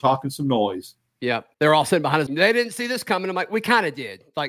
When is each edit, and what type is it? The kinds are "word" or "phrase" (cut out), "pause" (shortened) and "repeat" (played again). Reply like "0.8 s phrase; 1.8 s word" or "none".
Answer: 1.5 s pause; 2.3 s word